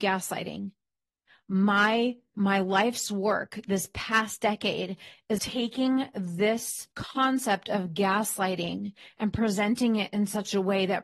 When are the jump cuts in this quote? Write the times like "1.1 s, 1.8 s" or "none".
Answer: 2.3 s, 5.4 s, 6.9 s